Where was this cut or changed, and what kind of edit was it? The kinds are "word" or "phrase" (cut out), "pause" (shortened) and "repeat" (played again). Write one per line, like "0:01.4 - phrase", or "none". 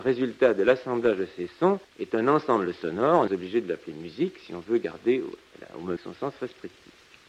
0:01.8 - pause
0:03.3 - phrase
0:06.0 - word

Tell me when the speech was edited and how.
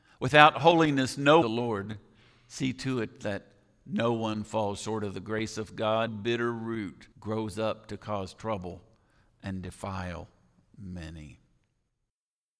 0:01.4 - phrase
0:06.1 - phrase
0:07.1 - pause

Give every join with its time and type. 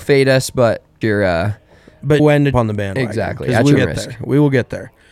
0:01.0 - word
0:02.2 - word
0:02.5 - word
0:03.8 - word

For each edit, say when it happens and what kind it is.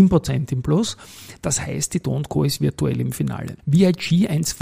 0:03.6 - pause

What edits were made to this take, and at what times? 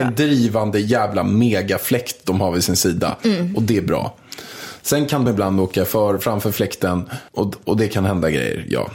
0:05.3 - word
0:07.3 - pause

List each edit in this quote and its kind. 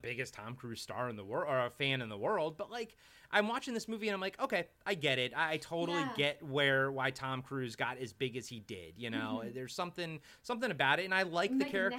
none

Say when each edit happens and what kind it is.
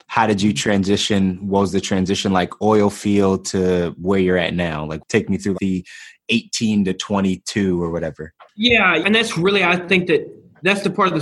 0:05.5 - word

